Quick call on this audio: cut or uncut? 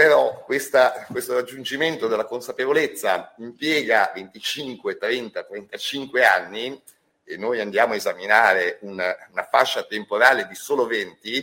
uncut